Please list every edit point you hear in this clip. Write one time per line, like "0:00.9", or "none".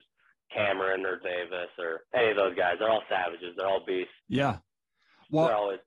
0:01.2
0:02.1
0:04.2

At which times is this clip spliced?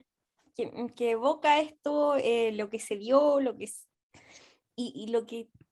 none

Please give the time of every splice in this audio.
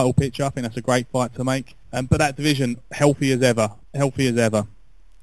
0:01.8
0:03.8

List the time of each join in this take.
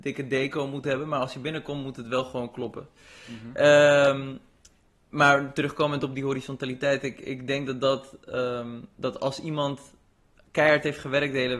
none

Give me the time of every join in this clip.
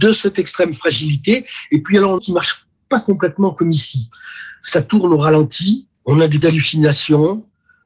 0:02.2
0:05.9
0:06.4

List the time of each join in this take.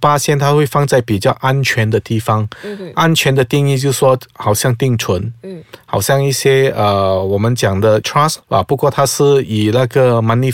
0:08.0
0:08.4

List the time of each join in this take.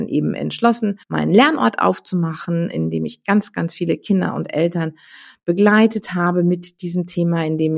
0:01.0

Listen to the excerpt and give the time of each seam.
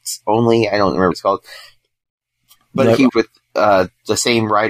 0:01.1
0:03.1

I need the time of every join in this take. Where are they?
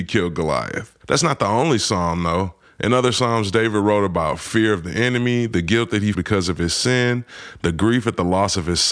0:01.0
0:06.1

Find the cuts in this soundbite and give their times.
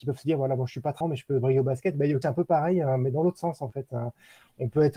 0:01.0
0:02.2

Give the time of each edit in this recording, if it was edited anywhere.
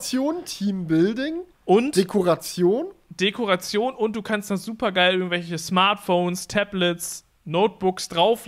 0:01.5

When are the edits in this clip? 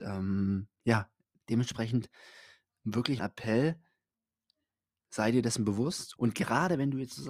0:01.4
0:03.2
0:06.2

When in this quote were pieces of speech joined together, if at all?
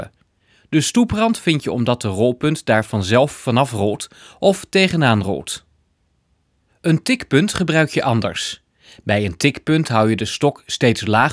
none

